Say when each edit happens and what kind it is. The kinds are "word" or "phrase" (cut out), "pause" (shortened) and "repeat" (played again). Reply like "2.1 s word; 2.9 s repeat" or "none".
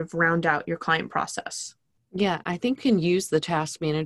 2.0 s pause; 2.8 s word

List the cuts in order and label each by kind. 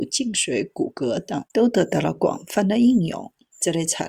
1.5 s pause

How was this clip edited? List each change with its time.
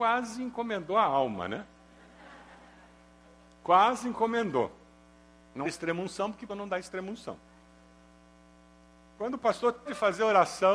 5.6 s word; 6.5 s word; 9.9 s word

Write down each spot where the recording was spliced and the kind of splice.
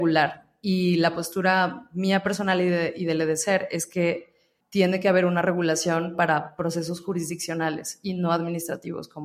4.6 s word

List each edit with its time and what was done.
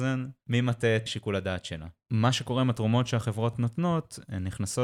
1.1 s word; 3.5 s word

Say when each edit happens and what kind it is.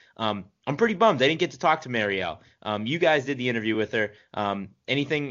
none

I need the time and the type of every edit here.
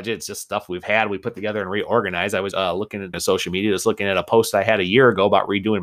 2.5 s word; 3.1 s word

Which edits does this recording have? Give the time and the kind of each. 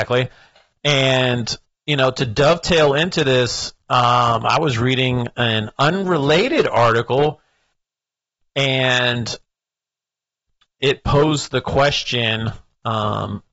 none

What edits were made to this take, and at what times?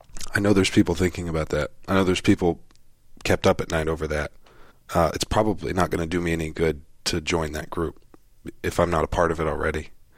4.7 s pause

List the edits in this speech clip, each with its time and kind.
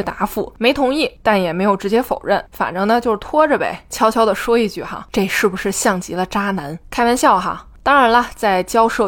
none

